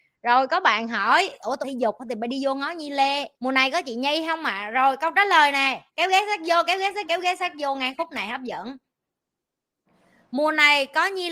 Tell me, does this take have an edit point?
yes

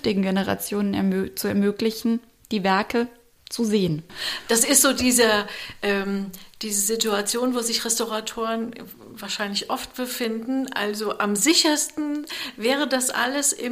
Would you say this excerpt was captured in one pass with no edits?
yes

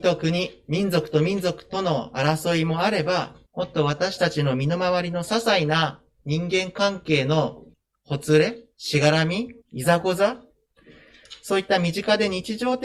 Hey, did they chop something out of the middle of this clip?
yes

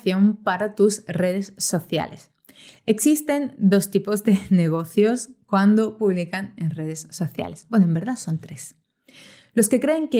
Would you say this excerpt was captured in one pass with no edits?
yes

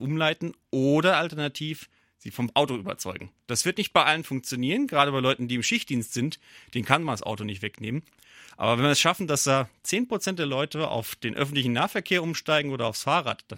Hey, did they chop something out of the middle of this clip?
no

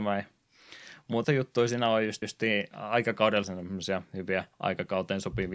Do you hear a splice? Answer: yes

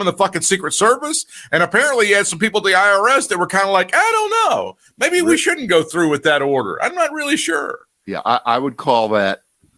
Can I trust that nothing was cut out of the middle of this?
yes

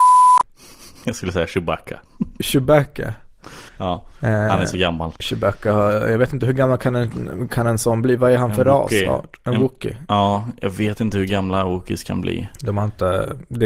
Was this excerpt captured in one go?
no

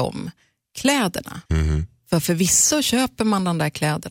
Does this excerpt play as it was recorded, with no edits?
no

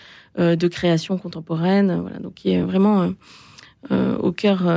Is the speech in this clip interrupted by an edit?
no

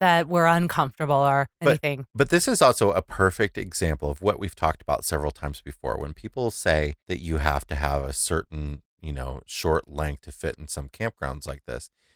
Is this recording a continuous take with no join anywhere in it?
no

